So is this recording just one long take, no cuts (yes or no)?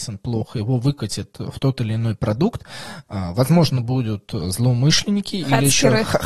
yes